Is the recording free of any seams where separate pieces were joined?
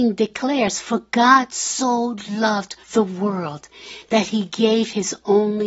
no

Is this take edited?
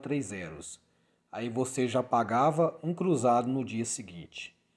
no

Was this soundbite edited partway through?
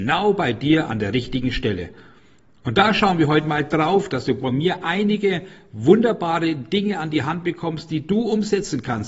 no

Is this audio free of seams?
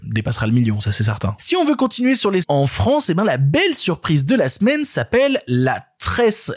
no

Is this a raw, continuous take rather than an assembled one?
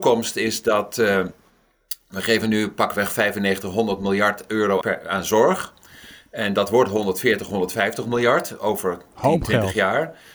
no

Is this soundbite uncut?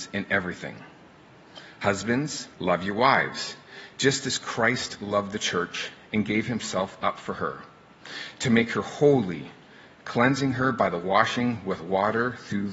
no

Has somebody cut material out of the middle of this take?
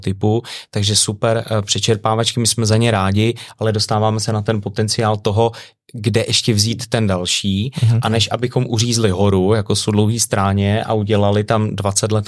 no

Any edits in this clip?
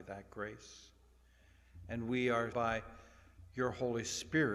yes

